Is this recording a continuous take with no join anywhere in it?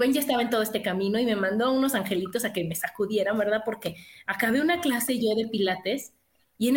yes; 0 cuts

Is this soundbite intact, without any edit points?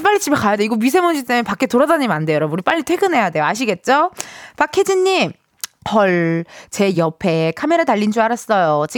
yes; 0 cuts

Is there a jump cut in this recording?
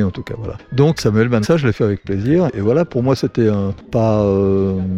yes; 3 cuts; at 1.0 s, 1.4 s, 2.5 s

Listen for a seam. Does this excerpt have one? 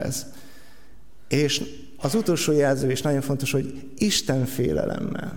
no; 0 cuts

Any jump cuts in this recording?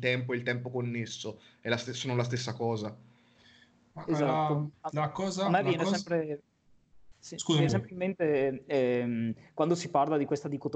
yes; 1 cut; at 7.7 s

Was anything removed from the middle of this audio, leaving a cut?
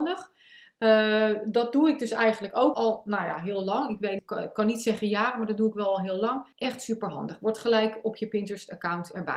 yes; 3 cuts; at 2.7 s, 4.2 s, 6.5 s

